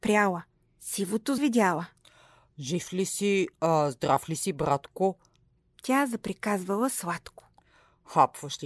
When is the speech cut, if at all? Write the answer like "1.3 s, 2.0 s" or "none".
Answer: 1.4 s